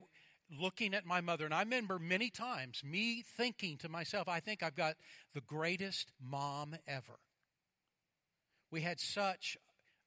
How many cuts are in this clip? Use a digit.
1